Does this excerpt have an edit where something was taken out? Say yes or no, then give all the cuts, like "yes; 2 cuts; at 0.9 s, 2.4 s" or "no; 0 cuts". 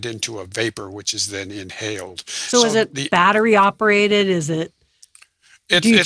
no; 0 cuts